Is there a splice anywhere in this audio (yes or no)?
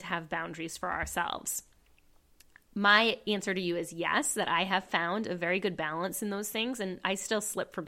no